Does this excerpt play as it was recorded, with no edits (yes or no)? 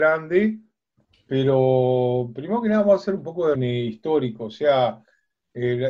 no